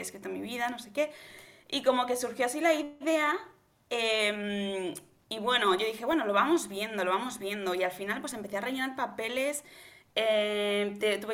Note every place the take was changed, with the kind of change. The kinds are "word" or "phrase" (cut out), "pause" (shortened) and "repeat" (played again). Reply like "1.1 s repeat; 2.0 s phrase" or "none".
none